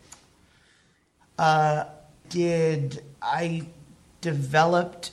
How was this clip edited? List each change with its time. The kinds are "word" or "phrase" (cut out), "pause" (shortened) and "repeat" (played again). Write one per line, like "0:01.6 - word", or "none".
0:02.2 - word
0:03.1 - pause